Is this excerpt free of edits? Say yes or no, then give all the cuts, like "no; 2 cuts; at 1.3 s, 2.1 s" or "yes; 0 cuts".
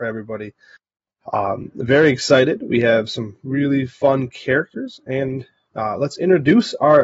yes; 0 cuts